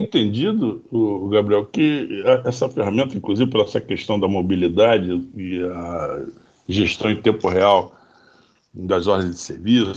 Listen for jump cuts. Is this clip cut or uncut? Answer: uncut